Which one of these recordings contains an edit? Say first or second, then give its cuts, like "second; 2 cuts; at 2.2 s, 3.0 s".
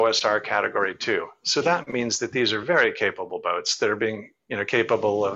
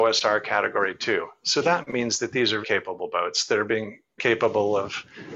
second; 2 cuts; at 2.6 s, 4.2 s